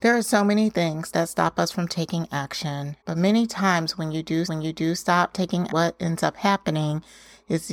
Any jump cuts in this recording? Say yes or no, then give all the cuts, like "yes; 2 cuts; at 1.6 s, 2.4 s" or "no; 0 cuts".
yes; 3 cuts; at 3.0 s, 4.5 s, 5.7 s